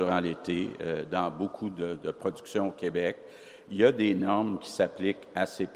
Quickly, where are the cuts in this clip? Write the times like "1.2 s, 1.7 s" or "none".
none